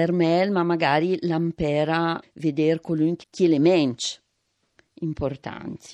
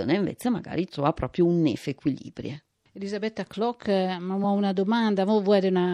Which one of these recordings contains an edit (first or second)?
first